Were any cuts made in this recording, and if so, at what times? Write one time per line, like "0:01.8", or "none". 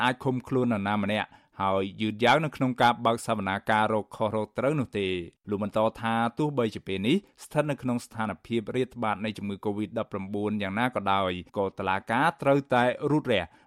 0:05.4
0:11.5